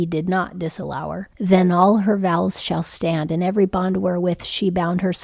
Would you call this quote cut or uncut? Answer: uncut